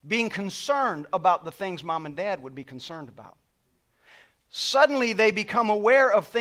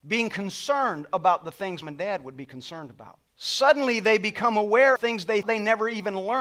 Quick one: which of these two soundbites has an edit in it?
second; 4 cuts; at 1.8 s, 3.3 s, 5.0 s, 5.4 s

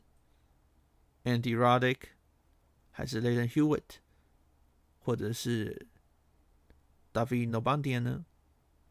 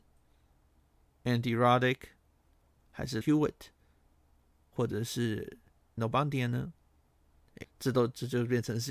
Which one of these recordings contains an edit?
second; 3 cuts; at 3.2 s, 6.0 s, 7.6 s

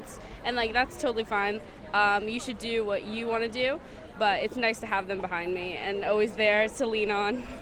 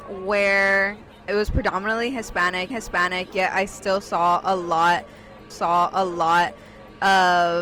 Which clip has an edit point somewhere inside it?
second; 3 cuts; at 1.3 s, 2.7 s, 5.5 s

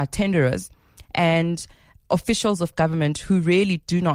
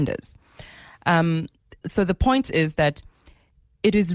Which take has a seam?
second; 1 cut; at 1.8 s

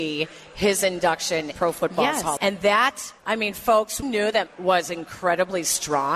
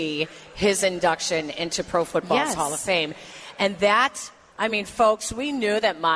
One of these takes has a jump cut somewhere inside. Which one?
first; 5 cuts; at 1.5 s, 2.4 s, 3.2 s, 4.0 s, 4.5 s

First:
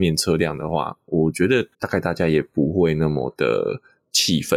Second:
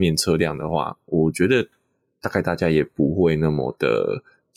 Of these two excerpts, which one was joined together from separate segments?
first; 1 cut; at 1.7 s

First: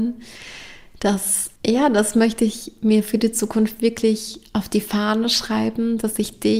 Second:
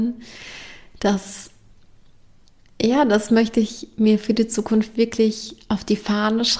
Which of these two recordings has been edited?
first; 1 cut; at 1.6 s

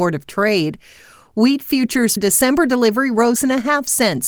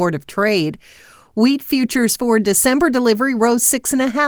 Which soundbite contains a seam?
first; 2 cuts; at 2.2 s, 3.4 s

